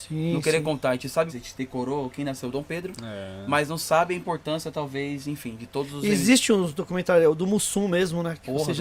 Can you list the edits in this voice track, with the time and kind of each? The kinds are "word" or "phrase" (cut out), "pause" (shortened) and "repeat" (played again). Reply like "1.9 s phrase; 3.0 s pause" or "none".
1.3 s phrase